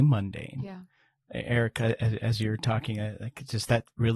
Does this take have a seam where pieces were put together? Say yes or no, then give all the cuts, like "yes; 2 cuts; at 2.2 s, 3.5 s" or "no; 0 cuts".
no; 0 cuts